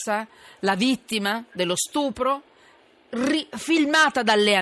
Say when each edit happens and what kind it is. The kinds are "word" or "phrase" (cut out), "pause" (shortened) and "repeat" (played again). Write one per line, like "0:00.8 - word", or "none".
none